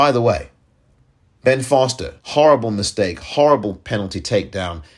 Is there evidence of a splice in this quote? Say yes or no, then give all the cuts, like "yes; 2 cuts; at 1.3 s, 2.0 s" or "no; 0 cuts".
yes; 1 cut; at 2.2 s